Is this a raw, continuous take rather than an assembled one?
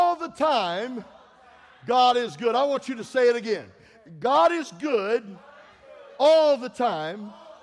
yes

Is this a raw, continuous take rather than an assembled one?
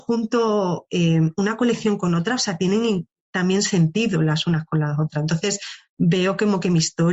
yes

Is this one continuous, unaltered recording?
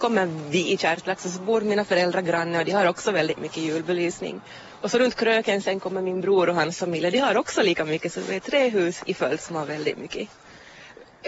yes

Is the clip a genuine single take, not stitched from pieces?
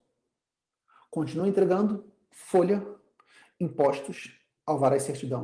yes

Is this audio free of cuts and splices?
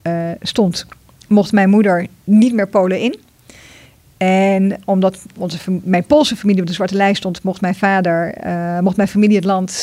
yes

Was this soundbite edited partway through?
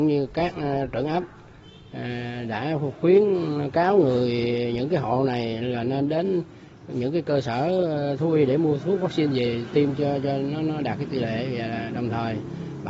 no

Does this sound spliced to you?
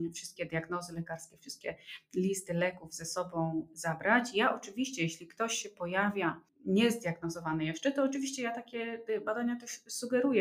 no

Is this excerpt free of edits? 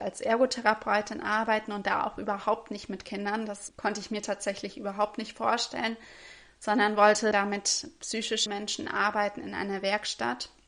no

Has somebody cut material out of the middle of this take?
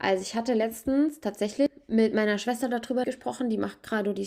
yes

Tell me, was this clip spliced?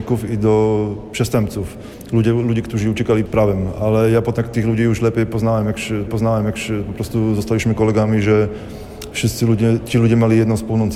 yes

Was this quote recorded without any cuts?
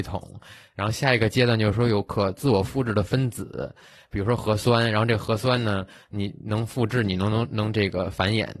yes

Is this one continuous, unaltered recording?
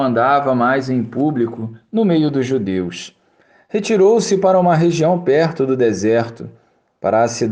yes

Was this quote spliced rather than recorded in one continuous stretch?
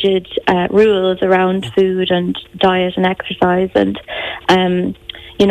no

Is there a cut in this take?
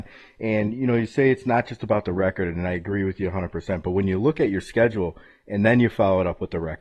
no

